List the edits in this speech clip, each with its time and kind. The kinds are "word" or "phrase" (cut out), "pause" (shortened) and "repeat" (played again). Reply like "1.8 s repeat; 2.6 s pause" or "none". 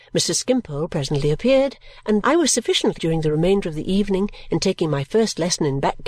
2.2 s phrase; 3.0 s word